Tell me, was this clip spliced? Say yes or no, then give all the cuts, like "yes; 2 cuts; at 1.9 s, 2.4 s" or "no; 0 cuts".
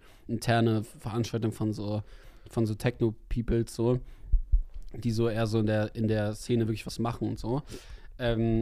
no; 0 cuts